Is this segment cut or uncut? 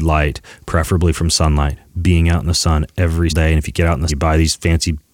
cut